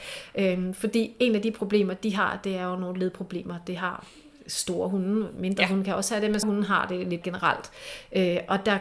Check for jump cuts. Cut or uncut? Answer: cut